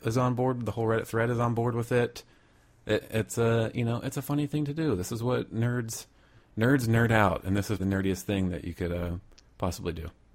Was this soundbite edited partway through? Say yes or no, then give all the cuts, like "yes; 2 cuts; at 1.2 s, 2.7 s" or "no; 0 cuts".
yes; 1 cut; at 7.8 s